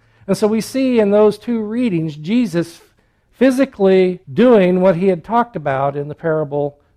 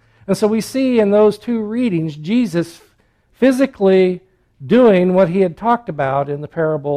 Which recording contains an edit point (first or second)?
first